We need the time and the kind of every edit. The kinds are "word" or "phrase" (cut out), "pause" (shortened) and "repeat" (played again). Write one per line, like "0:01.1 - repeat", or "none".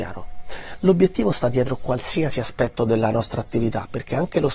none